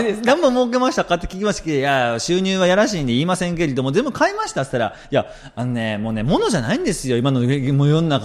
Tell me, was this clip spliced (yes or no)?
no